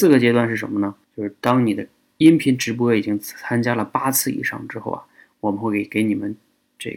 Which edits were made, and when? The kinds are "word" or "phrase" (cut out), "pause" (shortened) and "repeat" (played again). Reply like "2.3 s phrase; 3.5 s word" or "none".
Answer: 1.0 s pause